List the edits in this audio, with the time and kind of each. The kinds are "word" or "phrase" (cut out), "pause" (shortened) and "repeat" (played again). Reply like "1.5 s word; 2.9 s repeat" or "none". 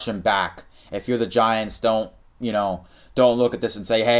none